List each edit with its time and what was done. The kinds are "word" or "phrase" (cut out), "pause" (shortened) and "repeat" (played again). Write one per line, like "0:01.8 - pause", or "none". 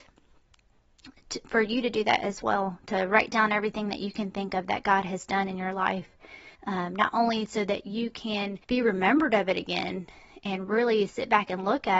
0:06.5 - pause
0:08.6 - pause